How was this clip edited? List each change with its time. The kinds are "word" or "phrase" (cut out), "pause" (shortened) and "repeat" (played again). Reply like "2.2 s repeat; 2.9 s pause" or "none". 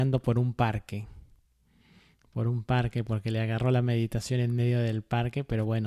none